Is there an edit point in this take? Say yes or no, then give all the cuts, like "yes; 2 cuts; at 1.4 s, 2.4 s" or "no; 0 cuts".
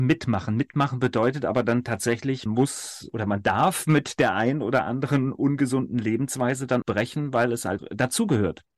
yes; 3 cuts; at 2.5 s, 6.8 s, 7.8 s